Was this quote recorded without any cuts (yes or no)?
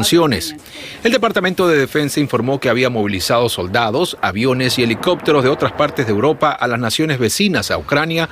yes